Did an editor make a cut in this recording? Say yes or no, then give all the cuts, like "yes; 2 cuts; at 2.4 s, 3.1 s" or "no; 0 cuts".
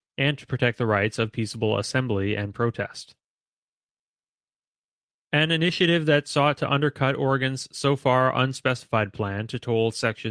no; 0 cuts